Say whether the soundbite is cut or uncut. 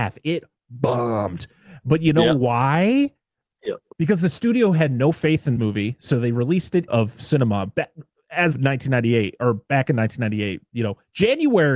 cut